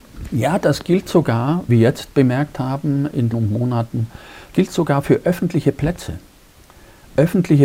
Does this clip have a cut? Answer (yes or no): yes